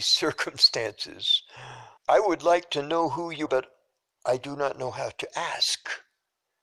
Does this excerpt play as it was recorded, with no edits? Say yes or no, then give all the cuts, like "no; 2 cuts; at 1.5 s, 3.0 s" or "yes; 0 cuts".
no; 2 cuts; at 2.0 s, 3.5 s